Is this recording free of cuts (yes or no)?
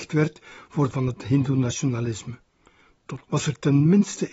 no